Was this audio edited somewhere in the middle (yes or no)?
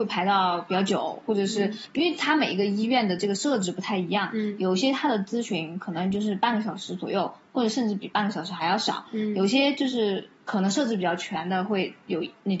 no